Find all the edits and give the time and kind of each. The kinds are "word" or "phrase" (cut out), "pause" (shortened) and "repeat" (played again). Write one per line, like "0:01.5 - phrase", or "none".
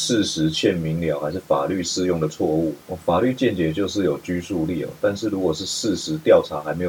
0:02.8 - pause